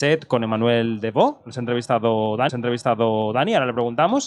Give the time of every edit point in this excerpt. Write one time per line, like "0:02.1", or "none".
0:02.5